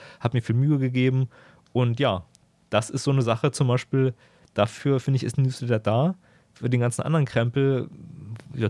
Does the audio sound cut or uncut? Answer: uncut